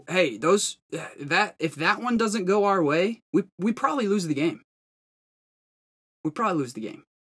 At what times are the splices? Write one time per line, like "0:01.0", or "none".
0:03.3